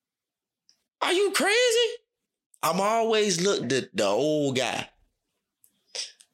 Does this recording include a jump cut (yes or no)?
yes